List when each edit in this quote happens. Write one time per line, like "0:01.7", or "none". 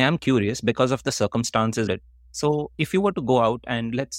0:01.9
0:02.7